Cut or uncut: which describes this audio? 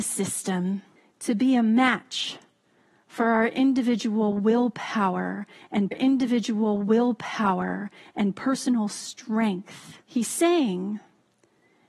cut